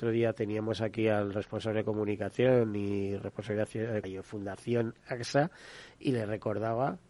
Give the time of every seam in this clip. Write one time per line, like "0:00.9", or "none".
0:04.0